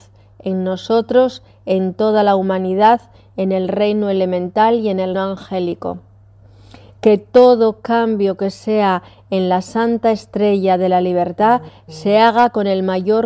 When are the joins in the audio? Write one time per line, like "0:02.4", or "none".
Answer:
0:05.1